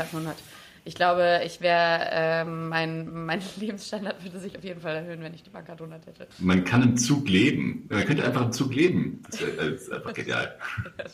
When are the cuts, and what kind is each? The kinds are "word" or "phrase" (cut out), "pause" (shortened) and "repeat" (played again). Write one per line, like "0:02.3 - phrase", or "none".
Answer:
0:06.3 - pause